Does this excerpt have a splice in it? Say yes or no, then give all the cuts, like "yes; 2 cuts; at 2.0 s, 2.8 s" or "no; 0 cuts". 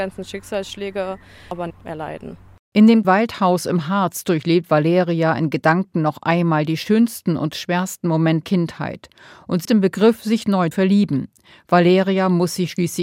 yes; 5 cuts; at 1.7 s, 3.0 s, 8.4 s, 9.6 s, 10.7 s